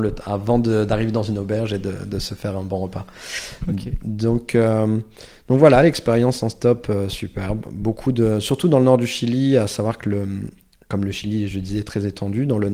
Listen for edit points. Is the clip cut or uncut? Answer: uncut